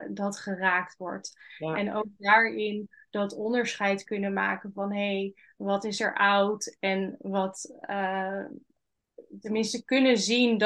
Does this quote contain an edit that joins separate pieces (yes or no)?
no